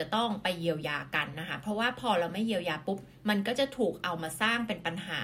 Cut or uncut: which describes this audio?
uncut